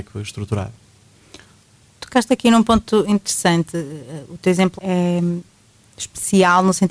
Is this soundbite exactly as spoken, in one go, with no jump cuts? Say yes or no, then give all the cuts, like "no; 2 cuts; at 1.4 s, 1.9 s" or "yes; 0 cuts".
no; 1 cut; at 4.8 s